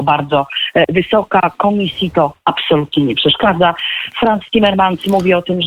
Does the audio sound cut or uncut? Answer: uncut